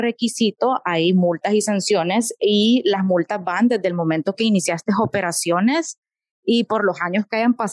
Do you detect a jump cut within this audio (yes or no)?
no